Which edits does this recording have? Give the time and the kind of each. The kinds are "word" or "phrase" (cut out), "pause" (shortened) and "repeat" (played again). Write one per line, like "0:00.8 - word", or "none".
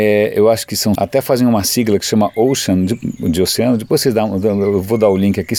0:01.0 - word